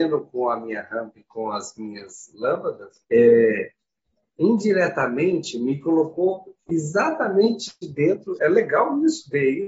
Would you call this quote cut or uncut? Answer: cut